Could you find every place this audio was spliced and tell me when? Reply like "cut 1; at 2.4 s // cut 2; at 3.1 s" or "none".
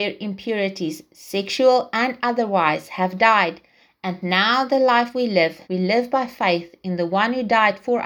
cut 1; at 5.6 s